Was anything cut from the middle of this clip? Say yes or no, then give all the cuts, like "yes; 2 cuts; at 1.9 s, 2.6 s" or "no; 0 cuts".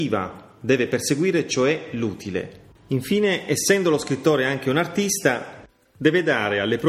no; 0 cuts